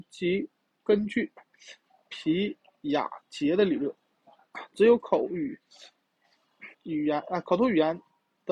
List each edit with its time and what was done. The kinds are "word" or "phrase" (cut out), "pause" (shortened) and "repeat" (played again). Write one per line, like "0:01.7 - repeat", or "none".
0:06.7 - pause